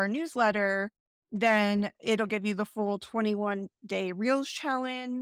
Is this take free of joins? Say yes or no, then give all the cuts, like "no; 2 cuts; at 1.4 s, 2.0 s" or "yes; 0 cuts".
yes; 0 cuts